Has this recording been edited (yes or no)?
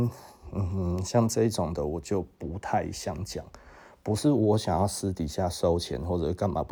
no